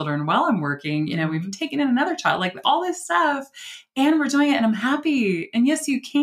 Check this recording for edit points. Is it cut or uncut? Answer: uncut